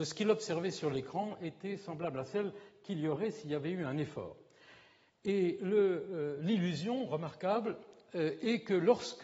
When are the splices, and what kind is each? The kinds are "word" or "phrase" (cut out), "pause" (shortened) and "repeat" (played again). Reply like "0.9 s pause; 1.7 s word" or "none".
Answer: none